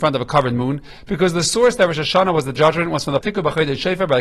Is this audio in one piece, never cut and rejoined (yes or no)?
no